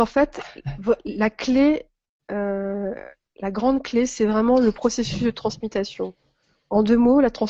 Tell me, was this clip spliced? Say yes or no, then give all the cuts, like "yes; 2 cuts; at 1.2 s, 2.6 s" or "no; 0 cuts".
no; 0 cuts